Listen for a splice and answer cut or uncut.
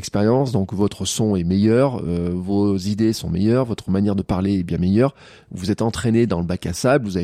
uncut